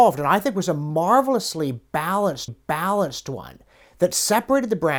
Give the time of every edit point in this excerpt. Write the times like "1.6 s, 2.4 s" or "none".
2.5 s